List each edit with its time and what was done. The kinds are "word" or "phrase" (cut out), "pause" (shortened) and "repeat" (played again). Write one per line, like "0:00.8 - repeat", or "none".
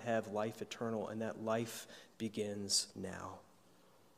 0:02.9 - pause